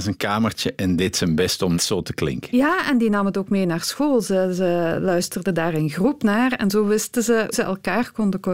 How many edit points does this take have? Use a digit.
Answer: 2